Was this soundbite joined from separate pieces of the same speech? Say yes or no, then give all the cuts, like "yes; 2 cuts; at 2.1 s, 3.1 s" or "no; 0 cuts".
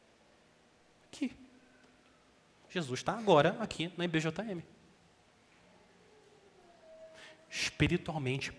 no; 0 cuts